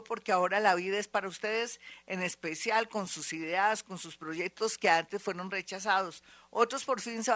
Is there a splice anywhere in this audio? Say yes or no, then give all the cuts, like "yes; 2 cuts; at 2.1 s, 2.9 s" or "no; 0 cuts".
no; 0 cuts